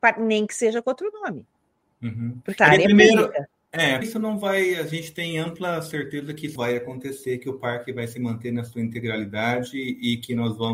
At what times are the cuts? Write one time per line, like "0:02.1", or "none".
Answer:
0:02.6
0:04.0
0:06.6